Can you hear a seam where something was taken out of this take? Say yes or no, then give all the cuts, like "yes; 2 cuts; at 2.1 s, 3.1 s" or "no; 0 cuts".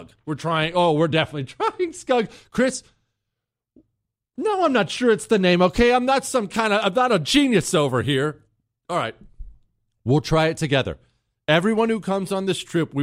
no; 0 cuts